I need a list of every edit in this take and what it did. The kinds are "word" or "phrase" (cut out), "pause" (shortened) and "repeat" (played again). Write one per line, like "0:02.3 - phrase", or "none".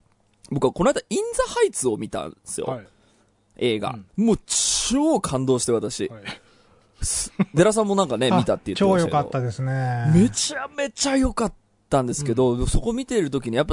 0:04.1 - pause